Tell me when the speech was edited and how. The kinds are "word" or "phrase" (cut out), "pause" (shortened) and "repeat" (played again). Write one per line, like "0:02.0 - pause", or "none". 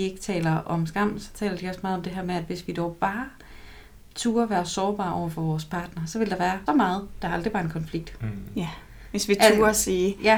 0:06.7 - word